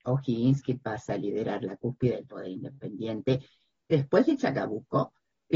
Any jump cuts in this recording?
no; 0 cuts

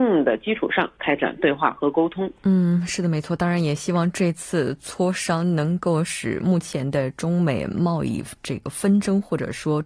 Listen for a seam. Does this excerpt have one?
yes; 1 cut; at 2.4 s

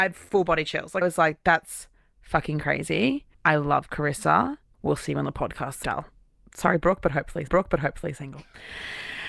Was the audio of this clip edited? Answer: yes; 4 cuts; at 1.0 s, 3.3 s, 5.8 s, 7.5 s

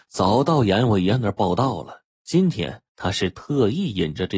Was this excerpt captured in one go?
no; 2 cuts; at 2.1 s, 2.9 s

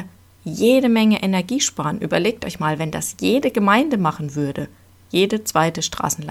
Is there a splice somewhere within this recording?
no; 0 cuts

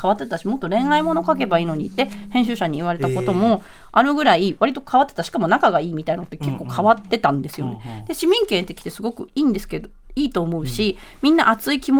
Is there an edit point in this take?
no; 0 cuts

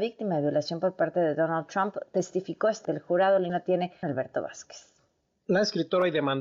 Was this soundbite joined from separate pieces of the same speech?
yes; 3 cuts; at 2.8 s, 3.5 s, 4.0 s

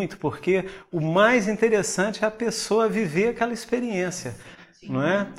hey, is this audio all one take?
yes; 0 cuts

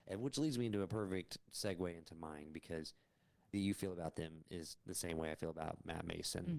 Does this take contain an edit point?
yes; 2 cuts; at 3.5 s, 4.8 s

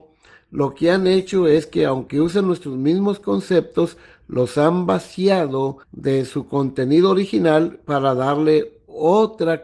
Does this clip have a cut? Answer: yes; 1 cut; at 5.8 s

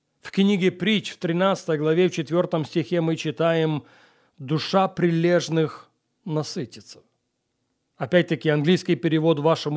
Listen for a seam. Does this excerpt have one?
no; 0 cuts

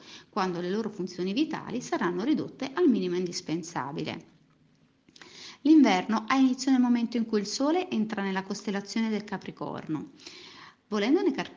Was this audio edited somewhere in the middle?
no; 0 cuts

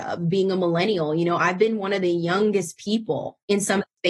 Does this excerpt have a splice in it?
no; 0 cuts

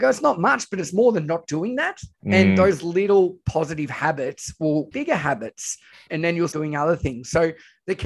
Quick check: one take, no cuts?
no; 4 cuts; at 2.1 s, 4.9 s, 6.1 s, 6.5 s

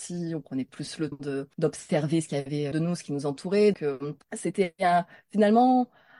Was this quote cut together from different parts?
yes; 5 cuts; at 1.1 s, 1.5 s, 2.7 s, 3.7 s, 4.2 s

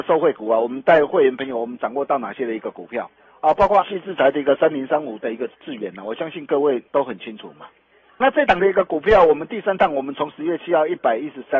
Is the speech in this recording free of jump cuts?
no; 5 cuts; at 3.2 s, 3.8 s, 5.5 s, 6.9 s, 8.2 s

